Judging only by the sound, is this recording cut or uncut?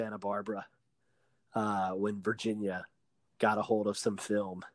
uncut